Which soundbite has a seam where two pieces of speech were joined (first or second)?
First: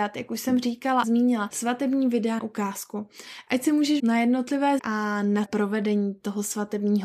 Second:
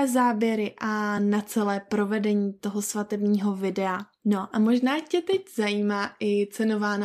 first